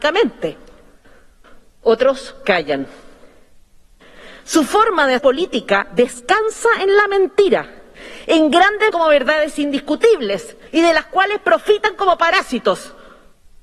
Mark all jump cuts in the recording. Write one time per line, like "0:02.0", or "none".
0:05.2
0:08.9
0:10.7